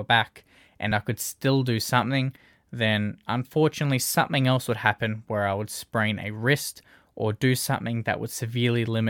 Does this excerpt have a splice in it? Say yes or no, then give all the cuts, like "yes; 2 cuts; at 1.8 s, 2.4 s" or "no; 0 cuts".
no; 0 cuts